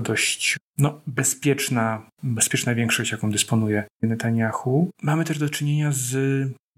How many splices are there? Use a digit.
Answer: 1